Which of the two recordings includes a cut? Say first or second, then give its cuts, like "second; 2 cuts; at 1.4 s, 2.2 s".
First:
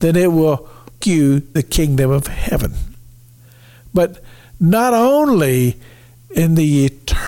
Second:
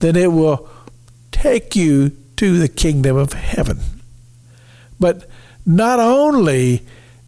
first; 2 cuts; at 1.0 s, 1.6 s